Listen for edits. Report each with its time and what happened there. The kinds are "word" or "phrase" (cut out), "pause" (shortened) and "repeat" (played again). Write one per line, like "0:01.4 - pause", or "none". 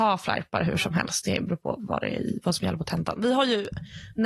none